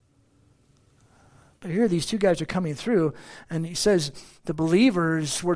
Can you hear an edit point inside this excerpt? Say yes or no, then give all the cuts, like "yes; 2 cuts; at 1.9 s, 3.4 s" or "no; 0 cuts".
no; 0 cuts